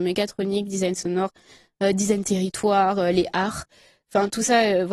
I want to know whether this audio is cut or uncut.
uncut